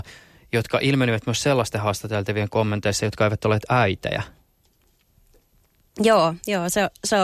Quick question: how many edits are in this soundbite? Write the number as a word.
zero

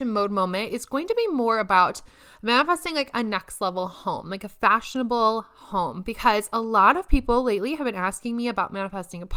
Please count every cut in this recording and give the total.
zero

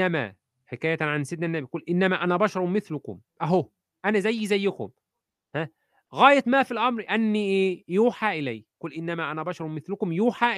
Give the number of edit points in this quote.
zero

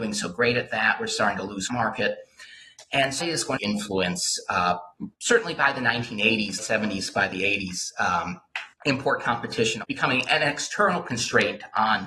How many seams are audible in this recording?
seven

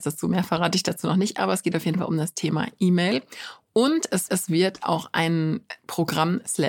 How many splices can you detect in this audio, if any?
one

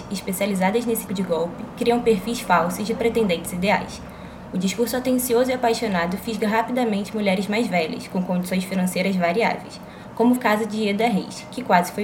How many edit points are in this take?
two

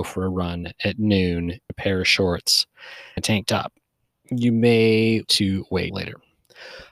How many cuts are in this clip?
four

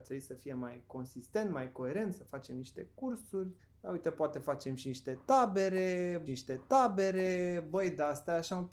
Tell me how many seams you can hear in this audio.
two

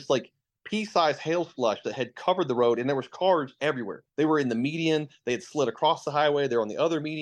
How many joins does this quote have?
one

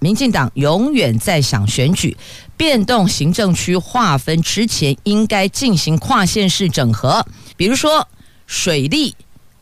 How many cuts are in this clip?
one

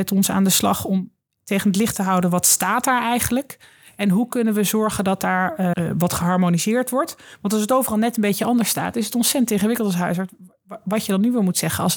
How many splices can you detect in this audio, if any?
one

